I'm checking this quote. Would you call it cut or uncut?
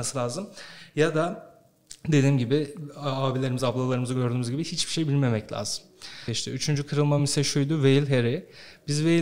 uncut